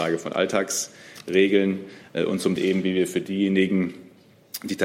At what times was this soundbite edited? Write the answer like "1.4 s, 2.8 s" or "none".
2.6 s